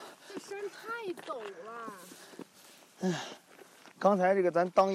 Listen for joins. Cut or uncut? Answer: uncut